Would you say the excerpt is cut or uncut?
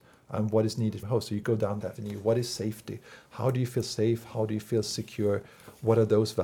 cut